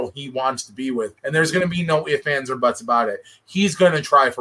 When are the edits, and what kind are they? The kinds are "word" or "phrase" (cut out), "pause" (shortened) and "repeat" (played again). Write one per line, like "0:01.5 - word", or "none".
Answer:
0:01.2 - pause

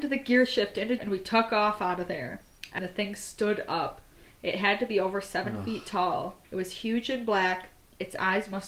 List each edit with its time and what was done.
0:01.0 - word
0:02.8 - phrase
0:06.4 - pause

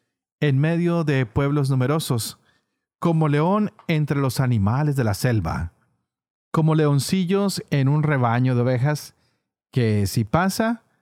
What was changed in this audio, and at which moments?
none

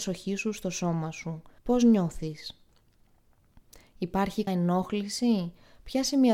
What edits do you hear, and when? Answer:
0:01.6 - pause
0:04.5 - word

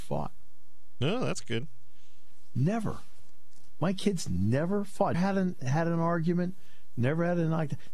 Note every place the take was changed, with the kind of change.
0:05.1 - word

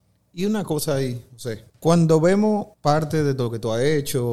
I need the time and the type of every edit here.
0:01.7 - pause
0:02.7 - pause

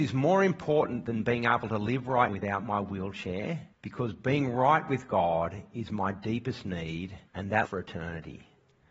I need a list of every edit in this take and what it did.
0:02.3 - word
0:03.7 - pause
0:07.3 - pause
0:07.6 - word

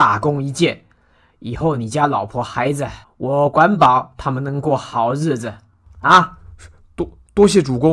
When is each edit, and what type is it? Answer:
0:03.0 - pause

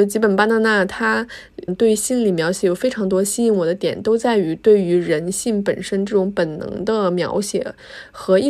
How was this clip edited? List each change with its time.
0:01.7 - word

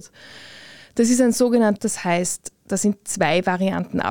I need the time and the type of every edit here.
0:01.8 - phrase

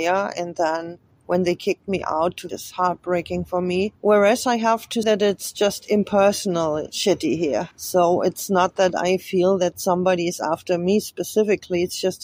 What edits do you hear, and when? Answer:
0:02.5 - phrase
0:04.0 - pause
0:05.0 - word
0:07.7 - pause

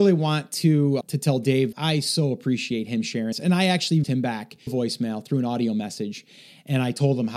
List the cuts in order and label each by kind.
0:01.0 - word
0:01.7 - word
0:03.3 - word
0:04.0 - word
0:04.7 - word

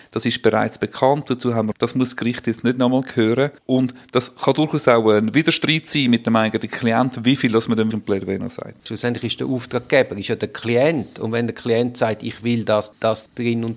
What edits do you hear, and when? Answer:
0:01.7 - phrase
0:03.6 - pause
0:07.9 - word

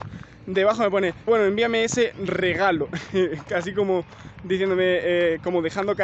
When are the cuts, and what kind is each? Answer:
0:01.3 - word

